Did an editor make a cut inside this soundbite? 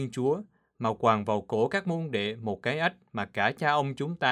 no; 0 cuts

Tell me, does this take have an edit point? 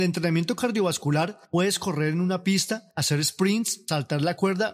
no; 0 cuts

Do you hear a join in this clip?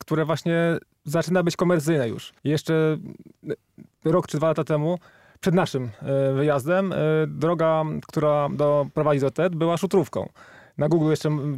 yes; 2 cuts; at 2.4 s, 4.3 s

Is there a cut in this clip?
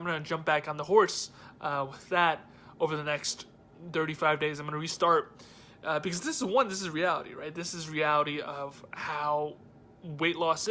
no; 0 cuts

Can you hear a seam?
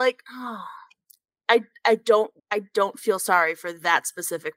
yes; 1 cut; at 2.4 s

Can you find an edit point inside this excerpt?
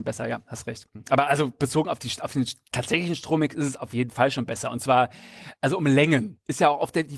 no; 0 cuts

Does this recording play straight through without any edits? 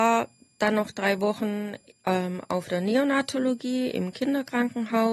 yes; 0 cuts

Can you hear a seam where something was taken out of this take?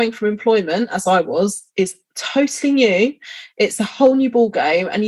no; 0 cuts

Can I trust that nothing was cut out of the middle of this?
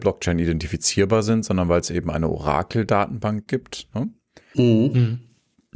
yes; 0 cuts

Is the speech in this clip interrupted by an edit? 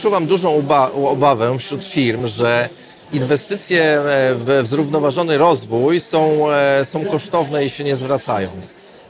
no; 0 cuts

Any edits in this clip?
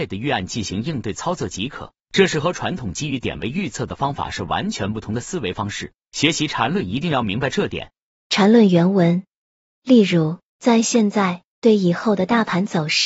no; 0 cuts

